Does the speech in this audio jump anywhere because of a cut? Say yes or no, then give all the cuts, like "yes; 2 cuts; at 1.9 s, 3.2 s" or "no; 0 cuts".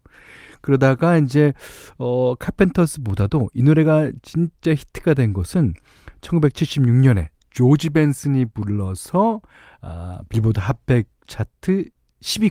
no; 0 cuts